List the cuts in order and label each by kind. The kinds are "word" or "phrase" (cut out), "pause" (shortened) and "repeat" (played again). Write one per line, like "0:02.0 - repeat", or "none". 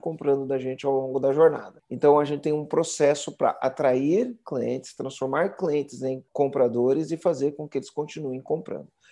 0:06.3 - pause